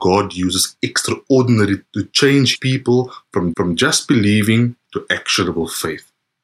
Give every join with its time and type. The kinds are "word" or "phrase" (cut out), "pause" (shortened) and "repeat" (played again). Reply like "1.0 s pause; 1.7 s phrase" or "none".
1.9 s word; 2.5 s word; 3.5 s repeat; 4.8 s pause